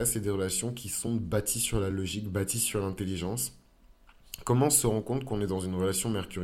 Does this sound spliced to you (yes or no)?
no